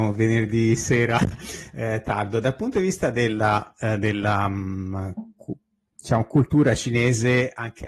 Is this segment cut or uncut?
uncut